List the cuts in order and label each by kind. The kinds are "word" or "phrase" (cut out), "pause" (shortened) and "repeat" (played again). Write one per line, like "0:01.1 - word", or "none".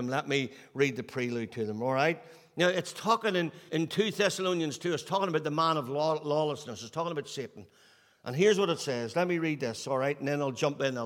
0:03.7 - word